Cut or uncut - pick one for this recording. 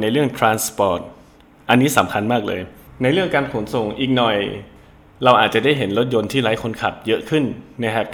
uncut